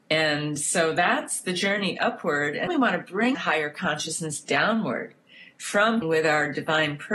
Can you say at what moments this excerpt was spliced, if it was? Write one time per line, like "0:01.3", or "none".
0:02.7
0:03.3
0:06.0